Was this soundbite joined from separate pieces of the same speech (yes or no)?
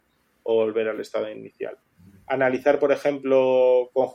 no